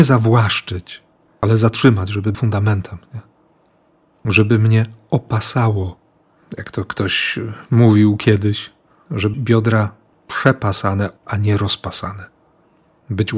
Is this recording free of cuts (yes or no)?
no